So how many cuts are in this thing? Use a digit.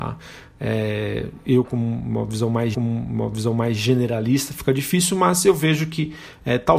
1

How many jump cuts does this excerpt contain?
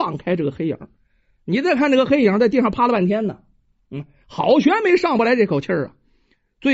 0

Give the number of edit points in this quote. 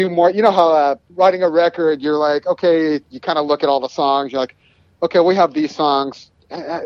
2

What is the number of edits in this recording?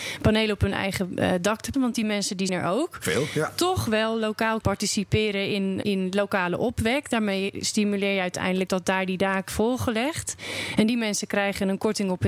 6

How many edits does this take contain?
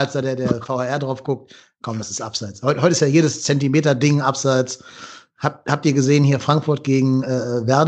0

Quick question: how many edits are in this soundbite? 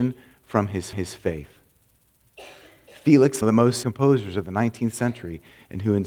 3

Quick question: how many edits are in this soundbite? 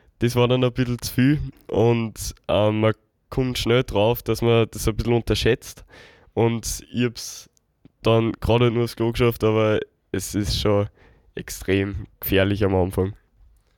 0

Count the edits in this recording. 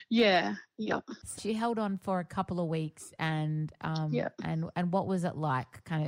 1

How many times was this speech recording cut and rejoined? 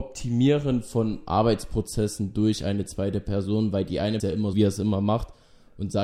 2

